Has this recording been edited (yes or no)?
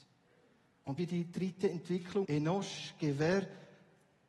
yes